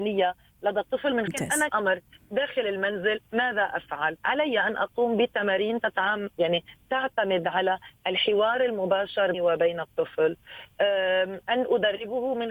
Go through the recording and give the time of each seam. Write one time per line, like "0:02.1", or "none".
0:01.3
0:01.7
0:03.3
0:04.2
0:09.3